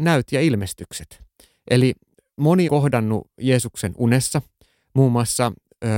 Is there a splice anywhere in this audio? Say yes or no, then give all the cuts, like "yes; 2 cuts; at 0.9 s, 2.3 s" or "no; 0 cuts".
yes; 1 cut; at 2.7 s